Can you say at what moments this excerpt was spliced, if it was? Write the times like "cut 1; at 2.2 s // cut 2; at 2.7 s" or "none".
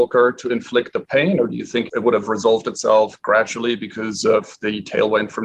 none